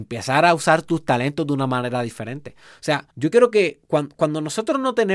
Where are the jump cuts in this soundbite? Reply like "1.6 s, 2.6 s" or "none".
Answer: 3.1 s

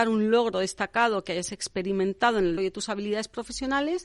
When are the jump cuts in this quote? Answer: 2.6 s

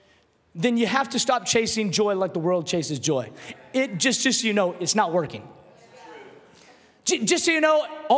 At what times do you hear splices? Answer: none

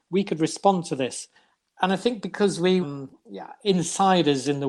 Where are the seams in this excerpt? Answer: 2.8 s

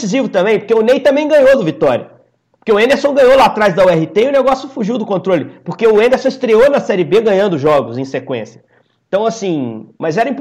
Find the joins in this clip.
none

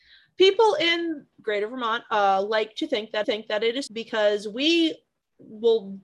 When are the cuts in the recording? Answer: 1.4 s, 3.2 s, 3.9 s

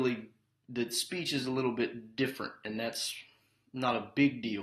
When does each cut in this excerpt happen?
none

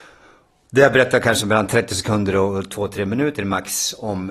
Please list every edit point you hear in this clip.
none

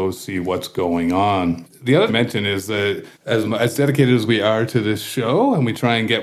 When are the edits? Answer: 2.1 s, 3.1 s

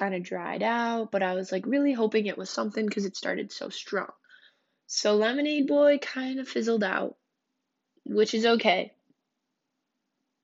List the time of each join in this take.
none

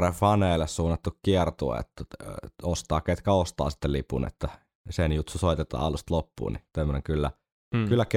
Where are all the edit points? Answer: none

